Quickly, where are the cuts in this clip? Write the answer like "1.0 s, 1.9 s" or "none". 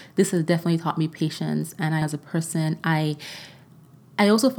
2.0 s